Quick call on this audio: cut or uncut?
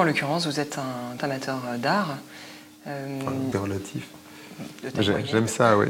cut